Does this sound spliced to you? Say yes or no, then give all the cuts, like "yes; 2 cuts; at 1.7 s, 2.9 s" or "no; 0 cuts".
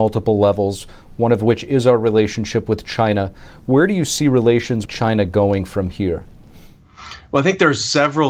yes; 1 cut; at 4.9 s